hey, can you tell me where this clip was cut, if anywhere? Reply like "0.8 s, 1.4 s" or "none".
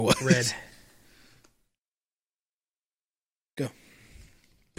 none